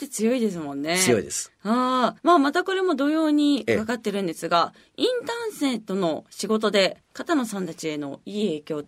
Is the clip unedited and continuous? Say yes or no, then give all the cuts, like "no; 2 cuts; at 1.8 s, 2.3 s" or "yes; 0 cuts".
no; 2 cuts; at 2.2 s, 7.0 s